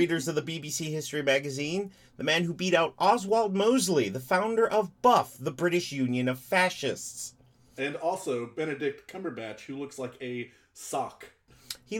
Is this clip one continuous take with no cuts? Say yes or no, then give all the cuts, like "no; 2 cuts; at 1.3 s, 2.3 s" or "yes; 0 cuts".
yes; 0 cuts